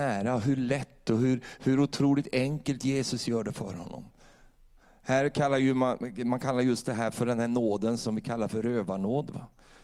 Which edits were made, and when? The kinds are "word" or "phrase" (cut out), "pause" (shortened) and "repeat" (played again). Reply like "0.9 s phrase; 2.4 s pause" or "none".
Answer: none